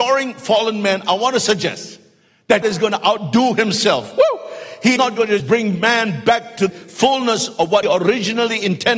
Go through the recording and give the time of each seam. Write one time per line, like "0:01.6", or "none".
0:02.6
0:05.0
0:05.4
0:06.7
0:07.8

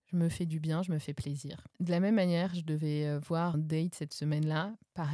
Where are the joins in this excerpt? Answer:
0:03.5

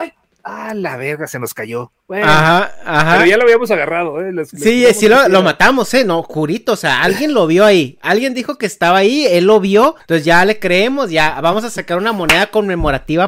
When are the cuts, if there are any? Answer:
0:02.0
0:10.0

